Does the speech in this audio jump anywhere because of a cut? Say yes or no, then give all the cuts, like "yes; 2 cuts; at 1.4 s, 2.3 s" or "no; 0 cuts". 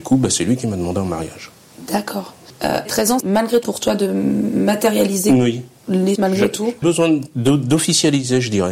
yes; 5 cuts; at 2.9 s, 3.2 s, 3.6 s, 6.2 s, 6.8 s